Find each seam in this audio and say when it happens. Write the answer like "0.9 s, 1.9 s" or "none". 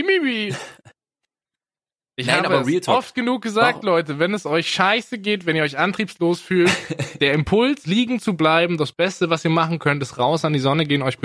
7.8 s